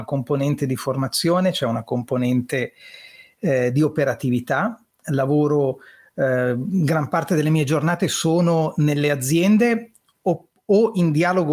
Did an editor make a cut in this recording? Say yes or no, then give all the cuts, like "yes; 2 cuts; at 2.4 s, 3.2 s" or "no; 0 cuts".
no; 0 cuts